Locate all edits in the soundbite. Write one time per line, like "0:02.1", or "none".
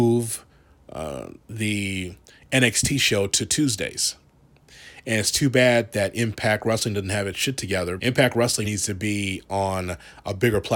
0:08.0
0:08.6